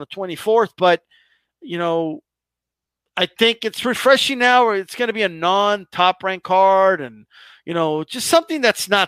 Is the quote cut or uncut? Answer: uncut